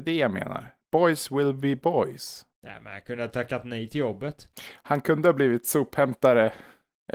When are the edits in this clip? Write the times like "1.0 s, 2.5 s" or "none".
2.5 s, 4.5 s